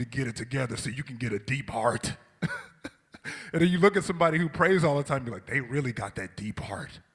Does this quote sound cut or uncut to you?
uncut